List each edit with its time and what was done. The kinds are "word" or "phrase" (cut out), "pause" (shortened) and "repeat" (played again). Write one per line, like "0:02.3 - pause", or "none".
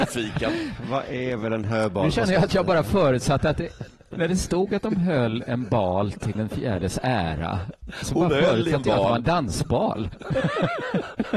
0:06.3 - word